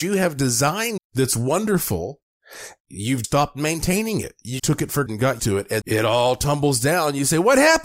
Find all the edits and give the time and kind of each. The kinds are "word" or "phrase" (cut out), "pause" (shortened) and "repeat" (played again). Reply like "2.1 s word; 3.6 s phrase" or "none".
1.0 s word; 2.8 s word; 3.2 s word; 4.6 s word; 5.1 s word; 5.4 s word; 5.8 s word